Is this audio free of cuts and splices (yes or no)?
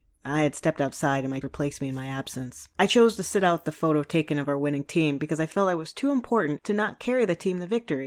no